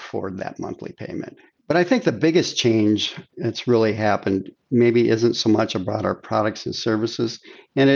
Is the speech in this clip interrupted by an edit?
no; 0 cuts

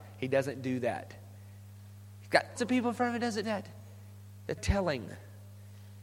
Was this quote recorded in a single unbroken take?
no; 3 cuts; at 2.6 s, 3.4 s, 4.6 s

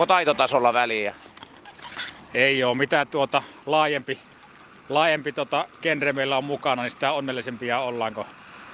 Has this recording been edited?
no; 0 cuts

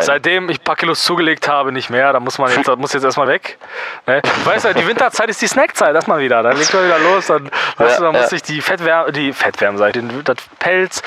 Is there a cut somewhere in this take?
yes; 3 cuts; at 3.3 s, 6.0 s, 9.9 s

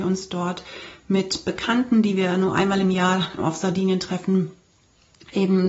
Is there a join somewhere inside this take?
yes; 1 cut; at 3.4 s

